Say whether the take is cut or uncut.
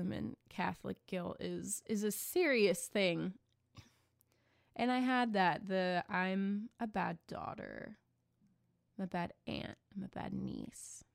uncut